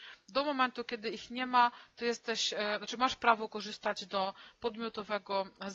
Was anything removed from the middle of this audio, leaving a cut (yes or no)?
no